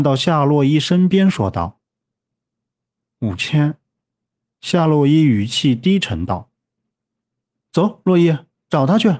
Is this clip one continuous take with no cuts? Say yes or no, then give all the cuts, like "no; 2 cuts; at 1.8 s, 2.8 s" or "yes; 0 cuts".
yes; 0 cuts